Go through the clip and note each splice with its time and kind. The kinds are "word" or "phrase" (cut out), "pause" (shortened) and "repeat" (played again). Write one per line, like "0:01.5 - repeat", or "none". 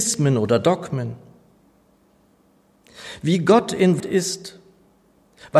0:04.0 - word